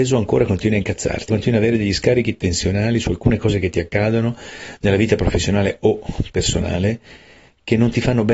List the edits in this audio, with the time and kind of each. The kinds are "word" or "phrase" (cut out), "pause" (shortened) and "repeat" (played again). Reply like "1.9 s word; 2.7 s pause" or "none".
1.3 s word